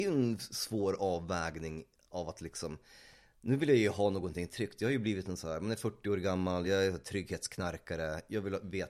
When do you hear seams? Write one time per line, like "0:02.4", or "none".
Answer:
none